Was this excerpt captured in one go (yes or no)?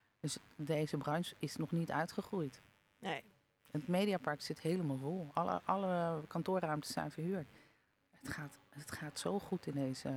yes